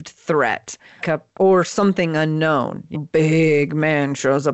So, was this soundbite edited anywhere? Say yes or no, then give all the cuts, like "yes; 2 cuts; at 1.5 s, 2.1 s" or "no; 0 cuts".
yes; 3 cuts; at 1.0 s, 1.4 s, 2.9 s